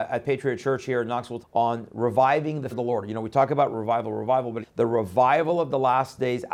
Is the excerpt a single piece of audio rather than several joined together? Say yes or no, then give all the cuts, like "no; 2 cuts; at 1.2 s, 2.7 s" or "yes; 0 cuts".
no; 4 cuts; at 1.4 s, 2.7 s, 3.7 s, 4.6 s